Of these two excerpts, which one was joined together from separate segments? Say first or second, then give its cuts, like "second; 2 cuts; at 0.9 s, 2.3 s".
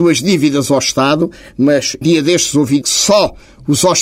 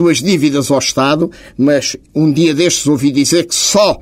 first; 2 cuts; at 2.0 s, 2.8 s